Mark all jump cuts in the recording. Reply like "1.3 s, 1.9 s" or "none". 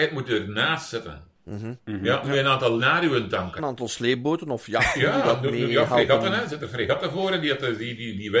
1.3 s, 1.8 s, 2.8 s, 3.6 s